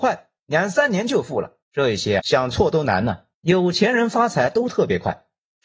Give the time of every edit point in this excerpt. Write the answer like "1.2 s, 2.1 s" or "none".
1.6 s, 2.2 s, 3.3 s